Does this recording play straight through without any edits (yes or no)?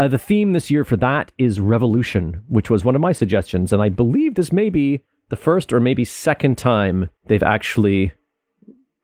no